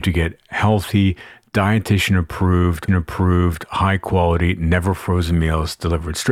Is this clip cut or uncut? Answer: cut